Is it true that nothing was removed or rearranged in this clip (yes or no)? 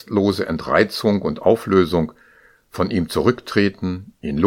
yes